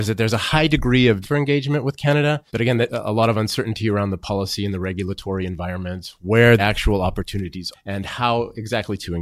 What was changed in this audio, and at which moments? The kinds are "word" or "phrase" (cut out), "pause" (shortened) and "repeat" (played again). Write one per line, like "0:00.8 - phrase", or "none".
0:01.2 - word
0:02.5 - pause
0:02.9 - word
0:06.6 - word
0:07.7 - word